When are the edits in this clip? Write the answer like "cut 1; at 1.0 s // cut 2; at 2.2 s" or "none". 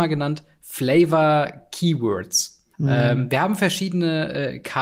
cut 1; at 2.7 s